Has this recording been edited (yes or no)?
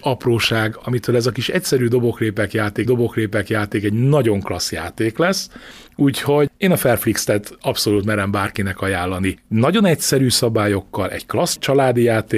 yes